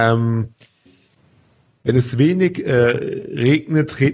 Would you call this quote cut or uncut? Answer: uncut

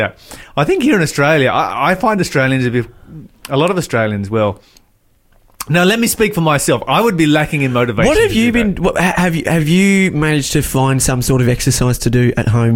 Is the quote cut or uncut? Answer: uncut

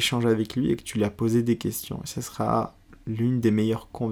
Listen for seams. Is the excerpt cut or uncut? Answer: uncut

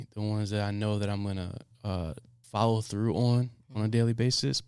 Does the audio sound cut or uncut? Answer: cut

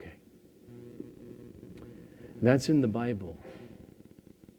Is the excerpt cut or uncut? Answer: uncut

